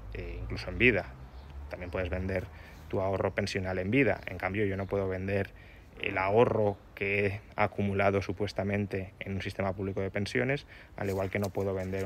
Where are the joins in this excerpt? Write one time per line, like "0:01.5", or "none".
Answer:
0:06.0